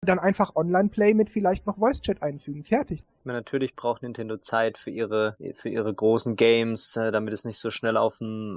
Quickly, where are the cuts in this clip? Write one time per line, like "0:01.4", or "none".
none